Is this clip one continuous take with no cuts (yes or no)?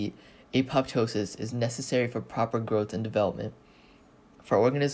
yes